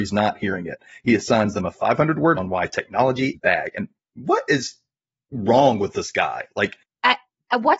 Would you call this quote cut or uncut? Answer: cut